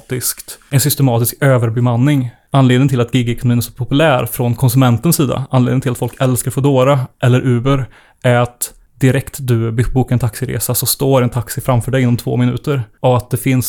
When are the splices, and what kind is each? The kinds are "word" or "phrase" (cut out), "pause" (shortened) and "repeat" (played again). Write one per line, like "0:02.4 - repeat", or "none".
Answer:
none